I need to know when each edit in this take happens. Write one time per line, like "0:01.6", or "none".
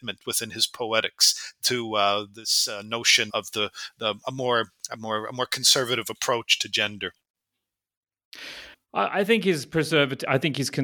0:03.3
0:08.7